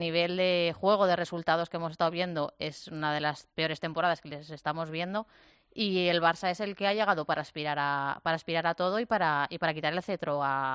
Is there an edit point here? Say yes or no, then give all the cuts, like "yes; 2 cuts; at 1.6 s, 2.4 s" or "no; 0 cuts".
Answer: no; 0 cuts